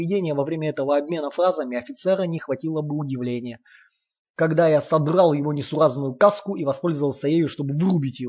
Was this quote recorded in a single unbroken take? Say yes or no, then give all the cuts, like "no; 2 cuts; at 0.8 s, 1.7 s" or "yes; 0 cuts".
yes; 0 cuts